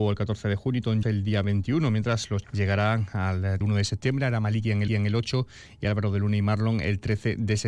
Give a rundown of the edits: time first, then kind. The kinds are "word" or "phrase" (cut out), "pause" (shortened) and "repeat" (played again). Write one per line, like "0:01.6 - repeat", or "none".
0:01.0 - word
0:02.4 - word
0:03.6 - phrase
0:04.9 - repeat